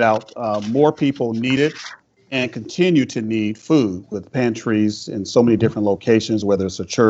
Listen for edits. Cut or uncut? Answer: uncut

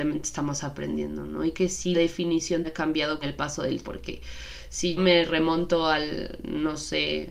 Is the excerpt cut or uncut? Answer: cut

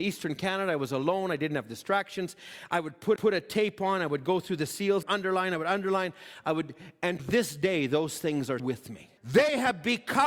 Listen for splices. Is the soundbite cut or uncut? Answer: cut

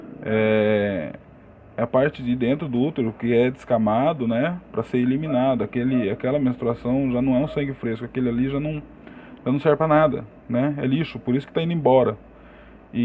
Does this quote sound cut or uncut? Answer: uncut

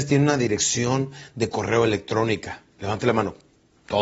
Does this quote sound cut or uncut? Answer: uncut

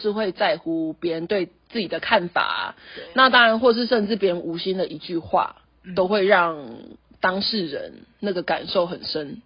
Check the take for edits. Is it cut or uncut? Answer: uncut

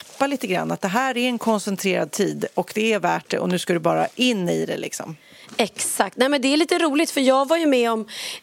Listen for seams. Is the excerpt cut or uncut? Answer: uncut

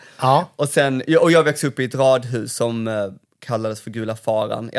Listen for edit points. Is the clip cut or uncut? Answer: uncut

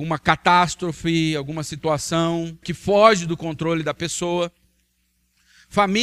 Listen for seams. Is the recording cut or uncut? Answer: cut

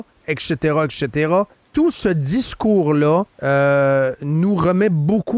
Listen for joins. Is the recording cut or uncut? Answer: cut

